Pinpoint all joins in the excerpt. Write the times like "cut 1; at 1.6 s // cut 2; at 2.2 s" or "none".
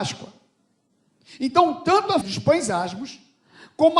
cut 1; at 2.2 s

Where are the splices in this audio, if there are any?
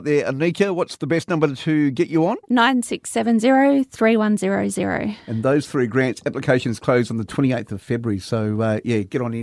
cut 1; at 2.4 s

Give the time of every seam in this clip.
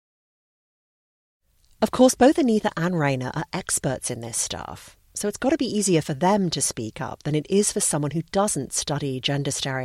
none

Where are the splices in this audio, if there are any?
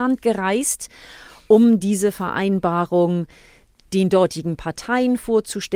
none

